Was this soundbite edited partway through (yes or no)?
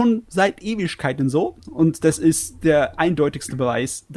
no